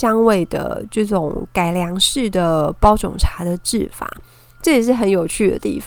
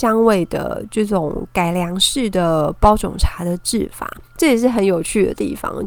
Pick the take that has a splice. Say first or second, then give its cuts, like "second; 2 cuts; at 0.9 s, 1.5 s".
second; 1 cut; at 4.3 s